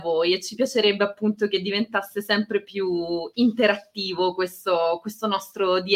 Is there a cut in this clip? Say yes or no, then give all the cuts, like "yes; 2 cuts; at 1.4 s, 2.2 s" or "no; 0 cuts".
no; 0 cuts